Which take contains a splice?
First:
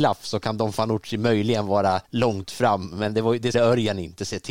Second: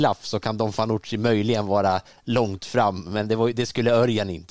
first; 2 cuts; at 2.0 s, 3.5 s

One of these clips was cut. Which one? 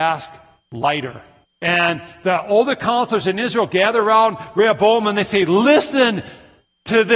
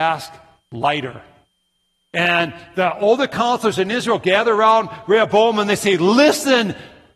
first; 1 cut; at 1.4 s

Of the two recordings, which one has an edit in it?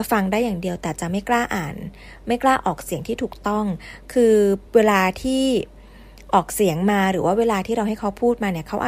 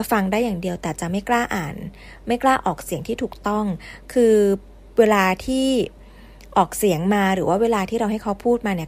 first; 1 cut; at 4.7 s

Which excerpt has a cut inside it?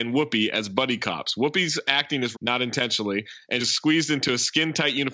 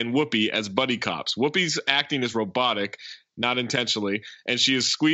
first; 2 cuts; at 2.3 s, 3.6 s

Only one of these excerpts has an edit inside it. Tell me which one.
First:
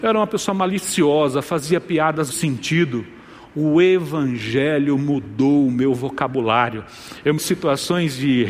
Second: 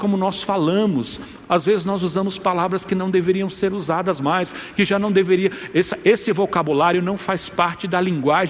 first; 2 cuts; at 2.3 s, 7.4 s

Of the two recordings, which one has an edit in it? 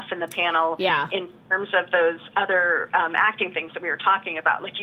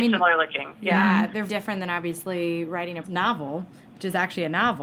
second; 2 cuts; at 1.5 s, 3.0 s

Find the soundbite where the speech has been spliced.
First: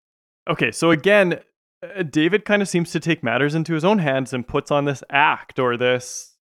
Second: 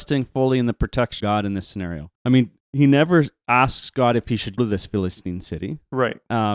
second; 4 cuts; at 1.2 s, 2.2 s, 2.6 s, 4.6 s

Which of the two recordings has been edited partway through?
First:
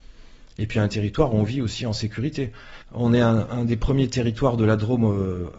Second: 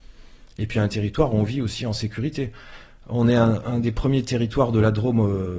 first; 1 cut; at 2.8 s

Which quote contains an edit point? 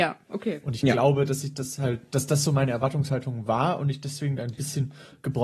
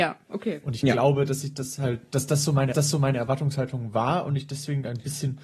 second; 1 cut; at 2.7 s

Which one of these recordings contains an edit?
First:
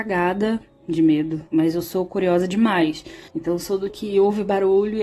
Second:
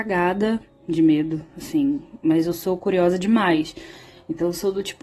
first; 3 cuts; at 1.5 s, 3.3 s, 3.9 s

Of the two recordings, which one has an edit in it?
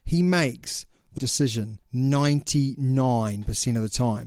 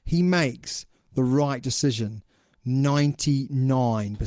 first; 2 cuts; at 1.2 s, 1.8 s

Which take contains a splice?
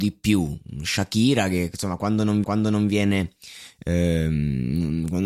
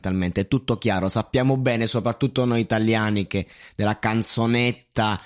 first; 1 cut; at 2.4 s

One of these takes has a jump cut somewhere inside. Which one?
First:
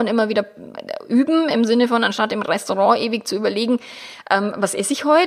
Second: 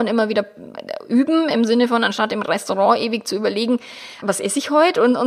second; 1 cut; at 4.2 s

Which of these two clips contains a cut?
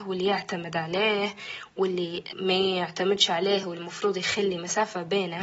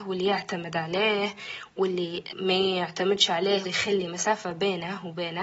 second; 1 cut; at 3.6 s

